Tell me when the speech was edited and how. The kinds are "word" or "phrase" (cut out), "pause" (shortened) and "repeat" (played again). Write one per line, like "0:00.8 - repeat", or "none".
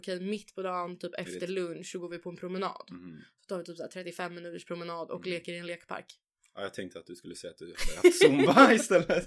none